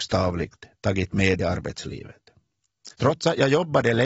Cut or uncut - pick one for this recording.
cut